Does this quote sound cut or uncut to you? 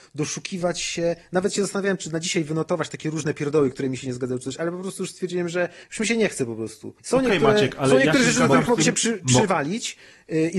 cut